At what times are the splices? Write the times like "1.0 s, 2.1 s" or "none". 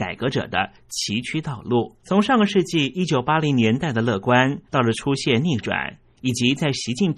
2.0 s, 4.7 s